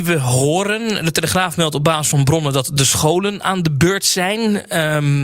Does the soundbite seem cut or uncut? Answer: uncut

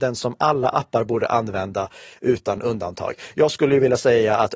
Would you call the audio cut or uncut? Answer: uncut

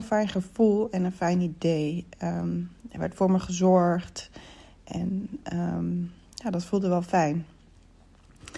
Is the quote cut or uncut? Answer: uncut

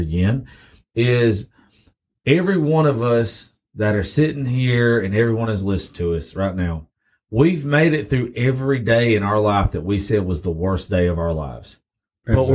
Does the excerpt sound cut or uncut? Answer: uncut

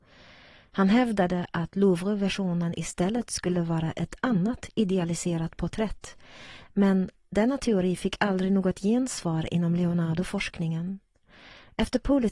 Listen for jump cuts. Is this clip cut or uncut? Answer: uncut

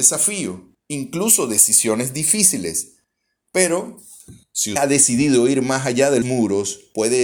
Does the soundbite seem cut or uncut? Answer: cut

